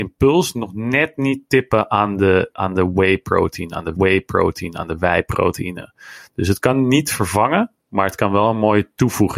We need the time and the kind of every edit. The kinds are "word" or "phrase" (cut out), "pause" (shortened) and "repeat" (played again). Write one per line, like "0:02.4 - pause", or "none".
0:04.0 - repeat